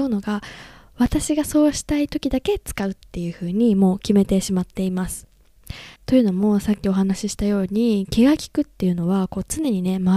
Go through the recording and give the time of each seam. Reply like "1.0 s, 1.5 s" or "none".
6.0 s